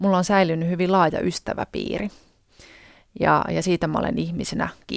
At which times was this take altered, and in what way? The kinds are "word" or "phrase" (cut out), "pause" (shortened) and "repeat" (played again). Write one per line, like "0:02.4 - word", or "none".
none